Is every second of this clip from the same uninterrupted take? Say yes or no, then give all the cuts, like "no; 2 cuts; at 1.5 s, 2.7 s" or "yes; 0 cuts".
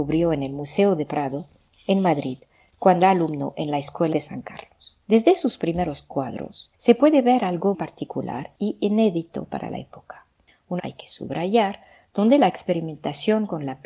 no; 6 cuts; at 3.0 s, 4.1 s, 5.0 s, 6.7 s, 7.7 s, 10.8 s